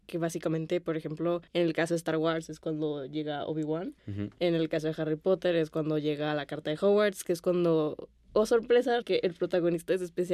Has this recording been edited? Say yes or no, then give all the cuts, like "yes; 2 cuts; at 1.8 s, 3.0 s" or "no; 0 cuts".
yes; 3 cuts; at 1.5 s, 4.0 s, 9.0 s